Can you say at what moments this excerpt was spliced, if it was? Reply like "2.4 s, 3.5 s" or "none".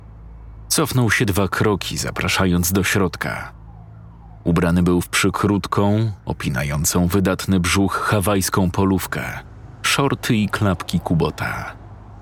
none